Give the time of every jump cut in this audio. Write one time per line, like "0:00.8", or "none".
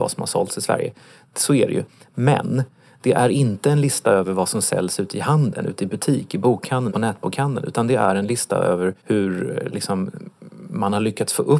0:06.9
0:09.0